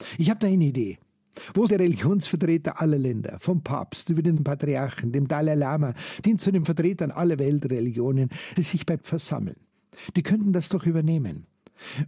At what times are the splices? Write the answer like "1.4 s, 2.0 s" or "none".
1.7 s, 4.4 s, 6.2 s, 8.6 s, 9.0 s